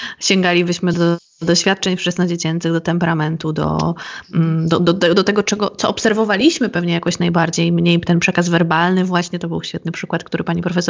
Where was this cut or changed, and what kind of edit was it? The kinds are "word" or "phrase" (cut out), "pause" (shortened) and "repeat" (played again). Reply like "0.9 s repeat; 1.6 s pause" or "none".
none